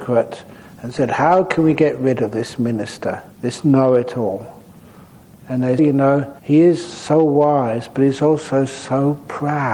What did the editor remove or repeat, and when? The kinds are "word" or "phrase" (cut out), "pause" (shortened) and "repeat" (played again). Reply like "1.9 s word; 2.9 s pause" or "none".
3.3 s pause; 5.8 s phrase; 6.4 s pause